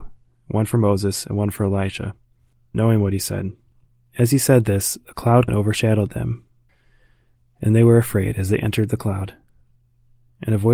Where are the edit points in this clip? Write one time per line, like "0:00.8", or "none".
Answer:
0:02.7
0:03.9
0:05.5